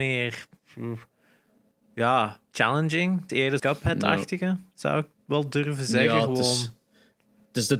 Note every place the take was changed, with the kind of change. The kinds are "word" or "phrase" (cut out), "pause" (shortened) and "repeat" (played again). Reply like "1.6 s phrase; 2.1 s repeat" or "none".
3.3 s word; 3.6 s phrase